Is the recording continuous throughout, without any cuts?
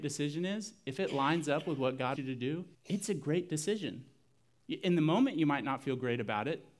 no; 2 cuts; at 2.2 s, 2.7 s

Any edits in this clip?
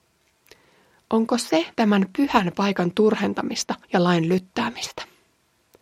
yes; 2 cuts; at 1.7 s, 3.8 s

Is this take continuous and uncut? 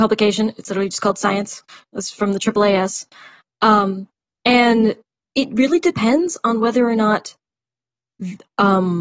yes; 0 cuts

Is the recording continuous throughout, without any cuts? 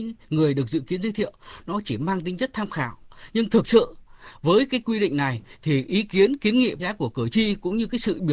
no; 1 cut; at 6.8 s

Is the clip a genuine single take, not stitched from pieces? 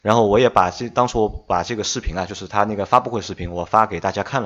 yes; 0 cuts

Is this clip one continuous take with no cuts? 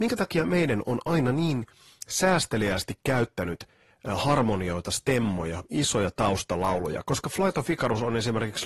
yes; 0 cuts

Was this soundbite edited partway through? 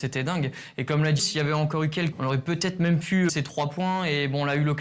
yes; 3 cuts; at 1.2 s, 2.1 s, 3.3 s

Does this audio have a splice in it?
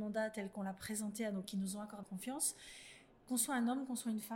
yes; 2 cuts; at 1.4 s, 2.0 s

